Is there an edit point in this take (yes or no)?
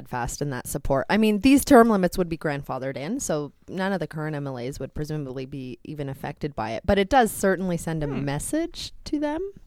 no